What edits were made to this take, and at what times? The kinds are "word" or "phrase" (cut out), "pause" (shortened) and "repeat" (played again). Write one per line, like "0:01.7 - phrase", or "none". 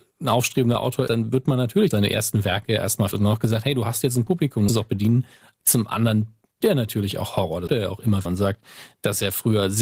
0:01.1 - word
0:01.9 - word
0:03.1 - word
0:04.7 - word
0:06.6 - word
0:07.7 - word
0:08.3 - word